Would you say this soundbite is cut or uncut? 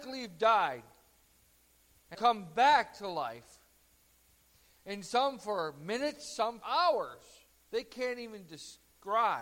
cut